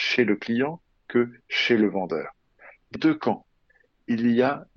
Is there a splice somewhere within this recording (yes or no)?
yes